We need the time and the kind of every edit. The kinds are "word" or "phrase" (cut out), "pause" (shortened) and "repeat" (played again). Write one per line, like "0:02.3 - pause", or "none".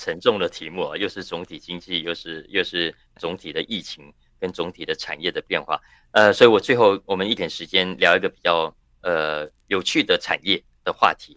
none